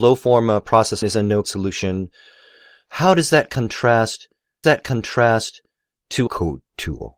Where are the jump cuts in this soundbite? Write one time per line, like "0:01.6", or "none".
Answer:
0:01.0
0:01.4
0:04.6
0:06.3